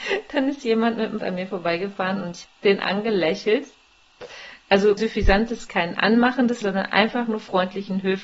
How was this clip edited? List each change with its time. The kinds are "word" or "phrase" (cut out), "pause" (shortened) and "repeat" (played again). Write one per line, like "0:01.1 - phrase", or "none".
0:01.2 - word
0:02.4 - word
0:05.0 - word
0:05.7 - word
0:06.6 - word